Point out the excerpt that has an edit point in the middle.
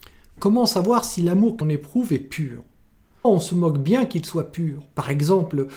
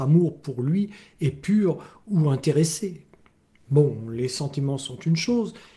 first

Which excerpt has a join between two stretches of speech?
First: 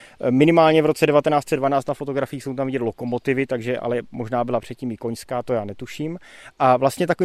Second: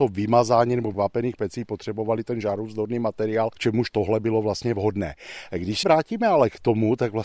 second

